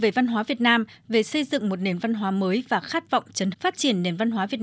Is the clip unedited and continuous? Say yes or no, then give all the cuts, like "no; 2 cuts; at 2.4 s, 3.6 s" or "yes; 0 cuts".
no; 1 cut; at 3.5 s